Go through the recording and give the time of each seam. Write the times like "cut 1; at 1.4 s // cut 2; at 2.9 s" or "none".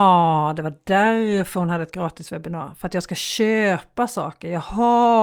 none